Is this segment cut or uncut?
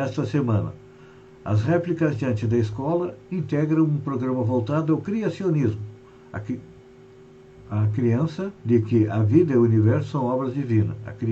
cut